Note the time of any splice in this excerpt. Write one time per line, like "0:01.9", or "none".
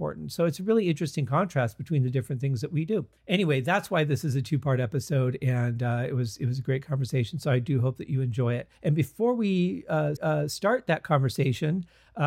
0:03.2
0:08.7
0:10.2